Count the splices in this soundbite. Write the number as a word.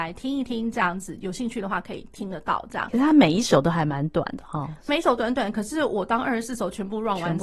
one